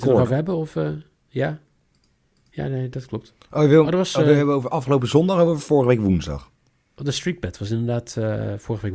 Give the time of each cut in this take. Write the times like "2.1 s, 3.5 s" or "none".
none

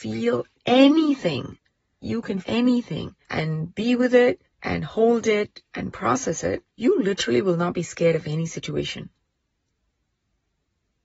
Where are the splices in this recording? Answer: 2.0 s, 2.4 s, 3.2 s, 4.4 s, 6.7 s

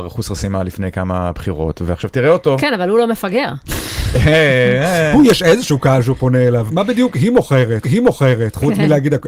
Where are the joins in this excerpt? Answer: 6.7 s, 7.8 s

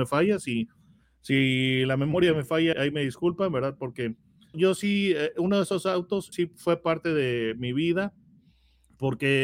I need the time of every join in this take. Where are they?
2.7 s, 4.5 s, 6.3 s

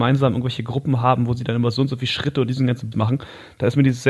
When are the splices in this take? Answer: 2.9 s

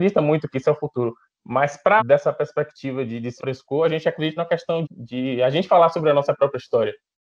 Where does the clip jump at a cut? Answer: 2.0 s, 3.4 s, 4.4 s, 4.8 s

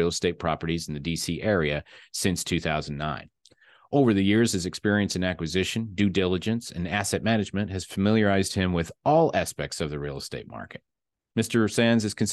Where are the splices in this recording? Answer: none

